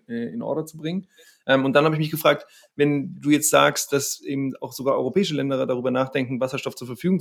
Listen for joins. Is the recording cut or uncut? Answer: uncut